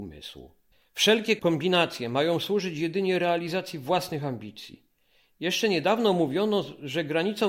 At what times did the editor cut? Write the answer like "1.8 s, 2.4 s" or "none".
none